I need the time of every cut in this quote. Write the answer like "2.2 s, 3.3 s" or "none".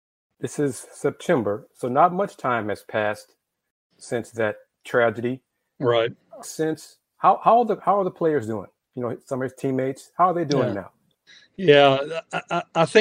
6.4 s